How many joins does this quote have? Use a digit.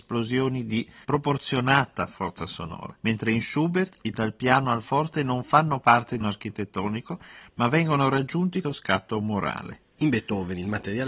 5